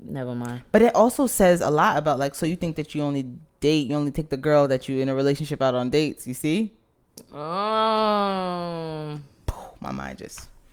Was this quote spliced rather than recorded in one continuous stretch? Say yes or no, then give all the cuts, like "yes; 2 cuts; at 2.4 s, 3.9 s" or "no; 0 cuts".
no; 0 cuts